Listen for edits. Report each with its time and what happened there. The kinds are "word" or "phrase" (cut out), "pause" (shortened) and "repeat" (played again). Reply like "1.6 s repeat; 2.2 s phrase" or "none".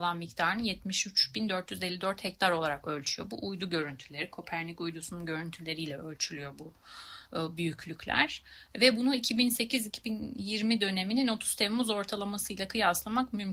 none